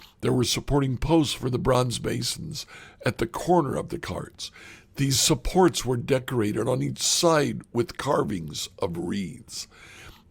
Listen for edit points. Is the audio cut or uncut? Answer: uncut